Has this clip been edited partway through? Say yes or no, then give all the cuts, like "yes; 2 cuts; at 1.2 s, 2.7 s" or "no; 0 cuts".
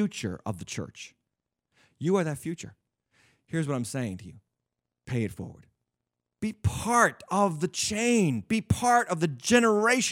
no; 0 cuts